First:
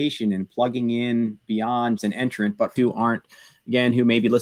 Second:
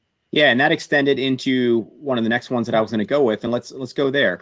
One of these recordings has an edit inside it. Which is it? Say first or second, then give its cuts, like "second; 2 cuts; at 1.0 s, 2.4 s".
first; 2 cuts; at 2.0 s, 2.8 s